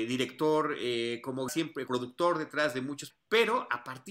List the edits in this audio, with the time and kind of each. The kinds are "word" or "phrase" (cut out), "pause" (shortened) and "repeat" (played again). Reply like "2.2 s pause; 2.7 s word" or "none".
1.5 s word; 1.9 s word; 3.1 s word

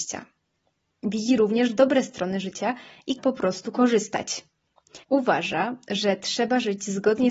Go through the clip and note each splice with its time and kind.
3.2 s phrase; 5.0 s pause

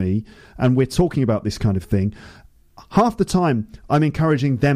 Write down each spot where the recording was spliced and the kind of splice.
none

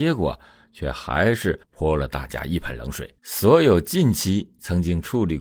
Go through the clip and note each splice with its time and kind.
1.6 s pause; 3.2 s pause

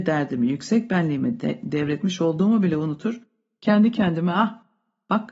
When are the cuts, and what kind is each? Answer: none

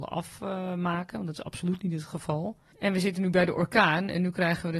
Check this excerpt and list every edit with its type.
none

